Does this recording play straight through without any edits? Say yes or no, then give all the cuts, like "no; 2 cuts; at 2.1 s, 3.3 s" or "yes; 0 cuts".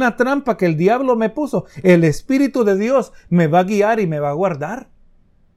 yes; 0 cuts